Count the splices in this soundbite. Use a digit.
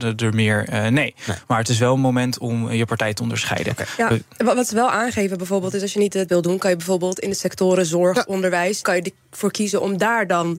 2